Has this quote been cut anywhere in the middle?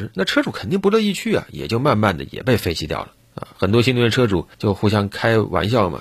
yes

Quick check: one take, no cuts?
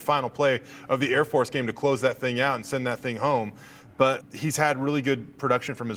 no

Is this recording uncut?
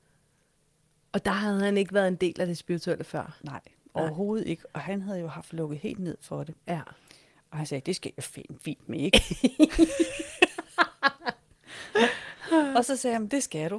yes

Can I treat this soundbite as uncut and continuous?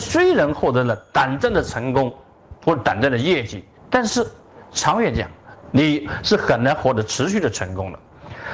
no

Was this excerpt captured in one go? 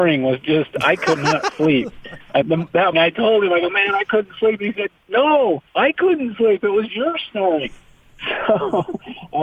no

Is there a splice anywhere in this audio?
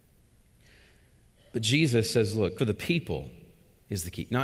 yes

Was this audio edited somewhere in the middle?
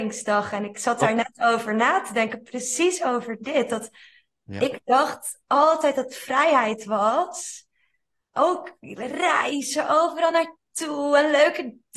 no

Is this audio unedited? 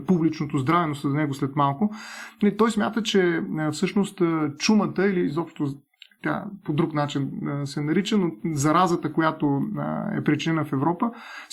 yes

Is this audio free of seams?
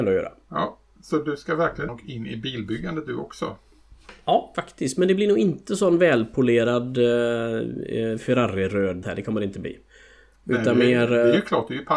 no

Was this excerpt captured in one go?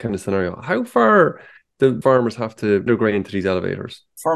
no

